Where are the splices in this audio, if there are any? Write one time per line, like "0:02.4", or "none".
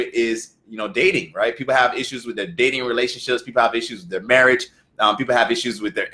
none